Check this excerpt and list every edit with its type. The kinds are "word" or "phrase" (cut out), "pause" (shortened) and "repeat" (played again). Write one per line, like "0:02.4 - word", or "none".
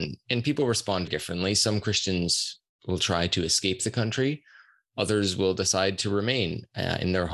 0:01.1 - word